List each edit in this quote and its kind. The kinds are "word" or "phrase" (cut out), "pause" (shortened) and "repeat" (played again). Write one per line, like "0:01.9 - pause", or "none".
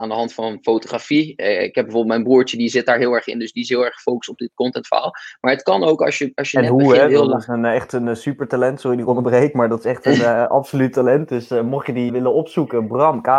0:12.1 - word